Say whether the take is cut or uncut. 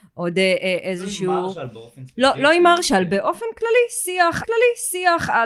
cut